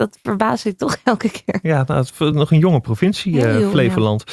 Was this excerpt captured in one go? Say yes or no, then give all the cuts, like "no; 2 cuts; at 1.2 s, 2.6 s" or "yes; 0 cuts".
yes; 0 cuts